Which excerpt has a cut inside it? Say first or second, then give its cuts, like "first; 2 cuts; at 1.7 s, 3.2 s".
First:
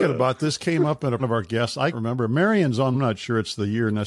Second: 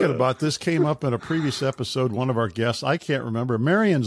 first; 3 cuts; at 1.2 s, 1.9 s, 2.9 s